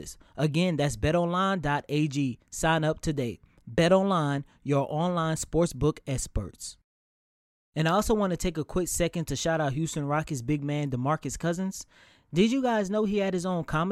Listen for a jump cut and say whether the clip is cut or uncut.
uncut